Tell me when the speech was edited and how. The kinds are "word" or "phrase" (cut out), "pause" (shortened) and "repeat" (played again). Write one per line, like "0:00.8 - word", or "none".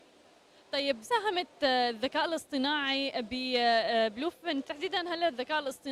0:01.0 - word
0:04.6 - word